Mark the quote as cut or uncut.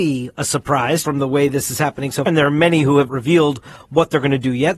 cut